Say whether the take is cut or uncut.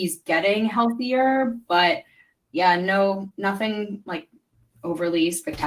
uncut